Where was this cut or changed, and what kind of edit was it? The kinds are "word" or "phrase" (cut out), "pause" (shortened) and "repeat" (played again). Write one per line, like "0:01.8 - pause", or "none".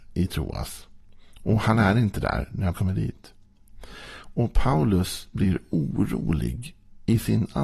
0:02.7 - word

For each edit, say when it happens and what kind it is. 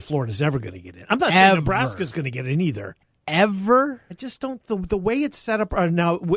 none

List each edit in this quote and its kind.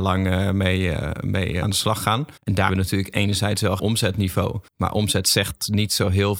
0:01.6 - word
0:02.4 - pause
0:02.7 - word
0:03.8 - phrase
0:04.7 - pause

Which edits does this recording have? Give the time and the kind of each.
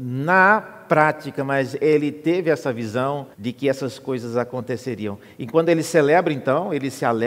0:03.3 - pause

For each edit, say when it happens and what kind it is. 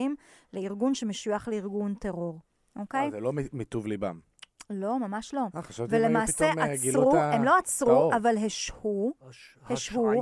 none

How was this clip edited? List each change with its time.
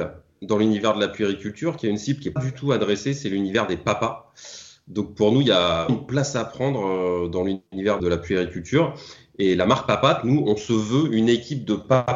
0:02.4 - word
0:05.9 - word
0:08.0 - word

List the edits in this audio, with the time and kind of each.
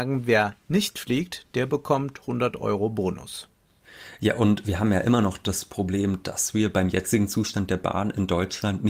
none

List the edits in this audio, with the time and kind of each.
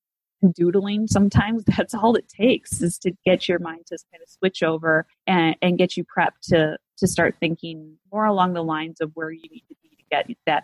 0:05.1 - pause
0:08.1 - pause

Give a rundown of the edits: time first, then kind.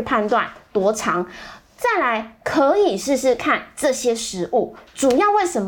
none

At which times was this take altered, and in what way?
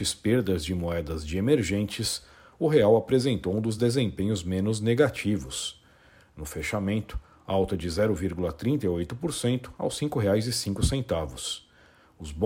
none

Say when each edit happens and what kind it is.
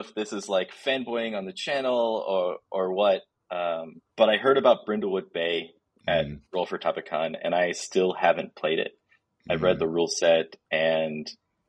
0:04.1 - pause
0:06.5 - pause

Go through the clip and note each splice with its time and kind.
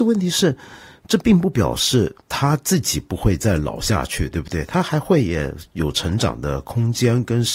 0:02.2 - pause

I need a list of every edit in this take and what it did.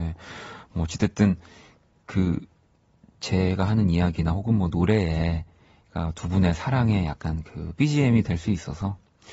none

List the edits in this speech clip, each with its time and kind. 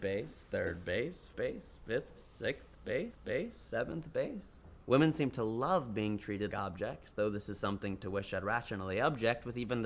0:01.3 - word
0:02.2 - word
0:03.1 - repeat
0:04.8 - pause
0:06.5 - word

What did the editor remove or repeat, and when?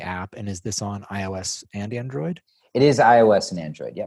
none

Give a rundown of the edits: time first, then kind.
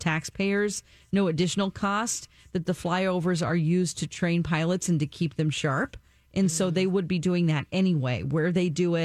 none

